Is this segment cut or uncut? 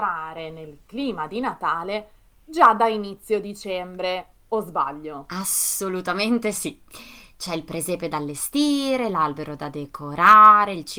uncut